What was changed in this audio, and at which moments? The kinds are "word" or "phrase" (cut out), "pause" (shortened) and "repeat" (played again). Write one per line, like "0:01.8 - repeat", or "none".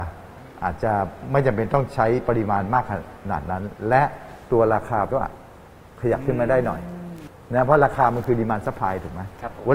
0:05.1 - word